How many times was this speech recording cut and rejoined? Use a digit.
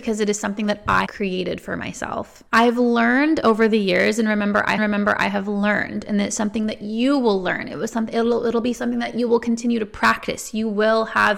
3